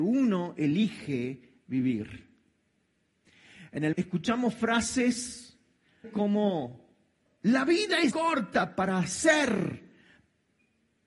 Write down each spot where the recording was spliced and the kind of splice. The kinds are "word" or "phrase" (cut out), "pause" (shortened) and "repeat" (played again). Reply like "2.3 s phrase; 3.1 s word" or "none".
3.9 s word; 6.0 s word; 7.3 s word; 8.1 s word